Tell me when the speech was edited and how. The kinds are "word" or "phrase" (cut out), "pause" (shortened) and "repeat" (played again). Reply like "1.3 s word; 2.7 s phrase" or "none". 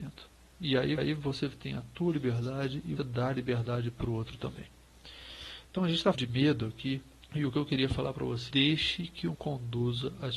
1.0 s repeat; 3.0 s word; 6.1 s word; 7.2 s pause; 8.5 s phrase; 9.3 s word